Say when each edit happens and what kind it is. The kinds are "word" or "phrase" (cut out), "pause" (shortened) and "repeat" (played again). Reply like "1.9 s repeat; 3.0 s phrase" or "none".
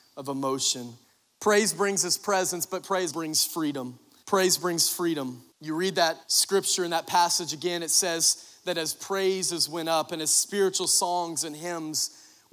1.0 s pause; 3.1 s word; 4.2 s pause; 5.5 s pause; 6.2 s pause